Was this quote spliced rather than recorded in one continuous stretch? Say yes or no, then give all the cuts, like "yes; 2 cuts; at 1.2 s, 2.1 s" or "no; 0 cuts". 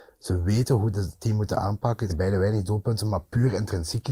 yes; 1 cut; at 2.1 s